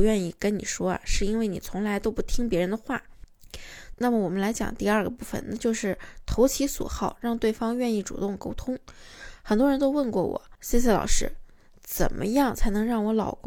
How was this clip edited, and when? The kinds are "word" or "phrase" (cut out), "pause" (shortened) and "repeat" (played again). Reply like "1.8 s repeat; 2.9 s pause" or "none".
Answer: none